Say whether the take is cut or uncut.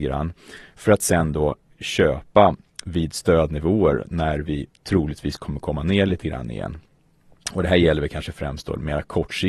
uncut